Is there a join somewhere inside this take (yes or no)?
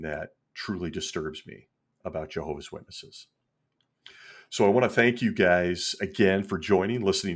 no